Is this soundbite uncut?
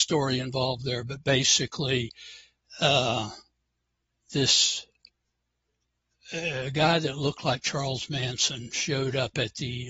yes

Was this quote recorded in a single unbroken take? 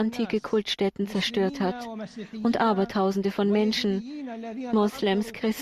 yes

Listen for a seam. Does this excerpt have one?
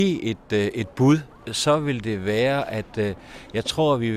no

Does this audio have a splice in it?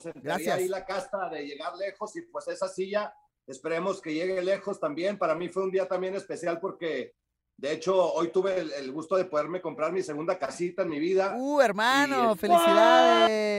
no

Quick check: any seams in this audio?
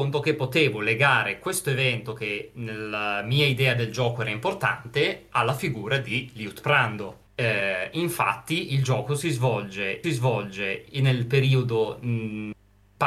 yes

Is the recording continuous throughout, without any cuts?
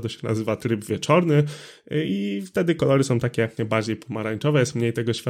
no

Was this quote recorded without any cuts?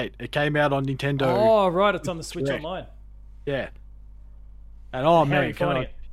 yes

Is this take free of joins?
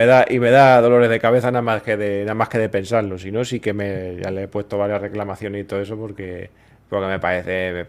yes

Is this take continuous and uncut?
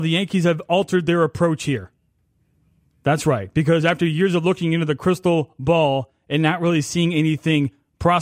yes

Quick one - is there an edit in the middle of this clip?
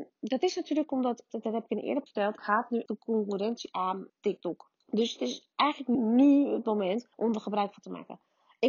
yes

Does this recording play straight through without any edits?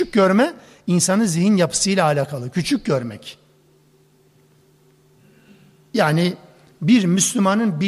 yes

